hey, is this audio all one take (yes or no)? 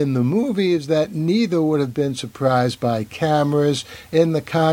yes